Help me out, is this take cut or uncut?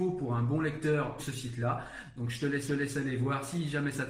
cut